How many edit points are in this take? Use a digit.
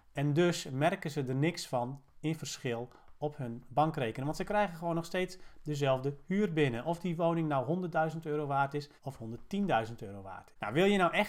1